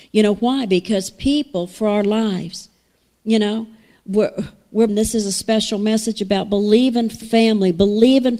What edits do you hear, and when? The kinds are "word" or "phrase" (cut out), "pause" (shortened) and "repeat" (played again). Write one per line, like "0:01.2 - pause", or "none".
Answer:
0:04.9 - word
0:07.2 - word